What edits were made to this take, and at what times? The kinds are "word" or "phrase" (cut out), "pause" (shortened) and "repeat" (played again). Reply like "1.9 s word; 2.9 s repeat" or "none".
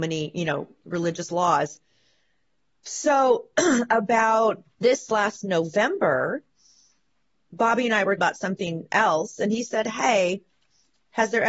4.8 s word; 8.2 s word